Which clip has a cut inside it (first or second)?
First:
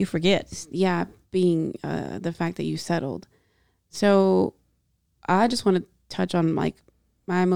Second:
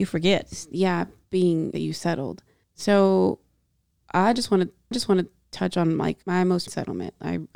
second